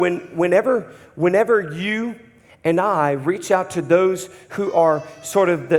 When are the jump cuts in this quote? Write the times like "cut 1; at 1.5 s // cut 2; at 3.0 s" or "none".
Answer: none